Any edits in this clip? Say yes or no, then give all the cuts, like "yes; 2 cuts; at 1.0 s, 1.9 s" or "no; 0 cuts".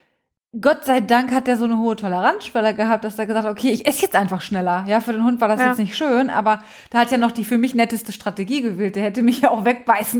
no; 0 cuts